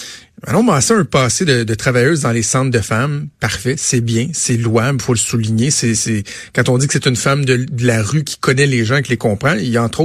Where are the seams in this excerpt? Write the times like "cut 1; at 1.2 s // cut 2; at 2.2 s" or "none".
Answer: none